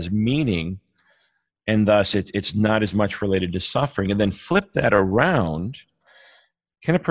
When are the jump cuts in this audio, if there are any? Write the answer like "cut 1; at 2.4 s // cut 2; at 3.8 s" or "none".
none